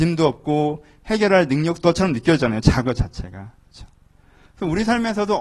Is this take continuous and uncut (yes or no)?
no